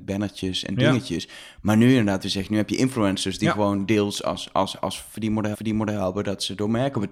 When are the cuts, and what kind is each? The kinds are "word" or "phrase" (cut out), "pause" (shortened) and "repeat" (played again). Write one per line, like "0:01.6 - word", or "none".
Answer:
0:05.5 - repeat